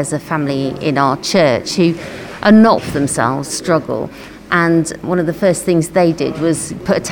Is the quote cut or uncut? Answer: cut